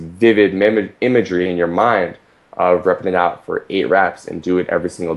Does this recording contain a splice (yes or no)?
no